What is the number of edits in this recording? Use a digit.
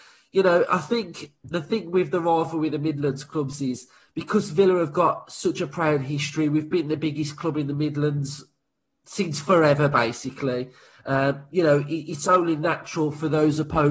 0